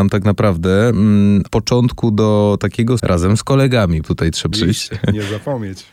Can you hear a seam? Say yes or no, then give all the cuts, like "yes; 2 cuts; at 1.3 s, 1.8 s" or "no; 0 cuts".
yes; 4 cuts; at 1.5 s, 3.0 s, 4.0 s, 4.5 s